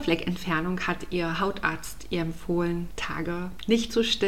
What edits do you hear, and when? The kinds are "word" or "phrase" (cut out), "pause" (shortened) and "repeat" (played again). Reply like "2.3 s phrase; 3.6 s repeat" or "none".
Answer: 2.9 s word